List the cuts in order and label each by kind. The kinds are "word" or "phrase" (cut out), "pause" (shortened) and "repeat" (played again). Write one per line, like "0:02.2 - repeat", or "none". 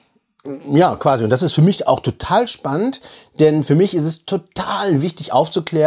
none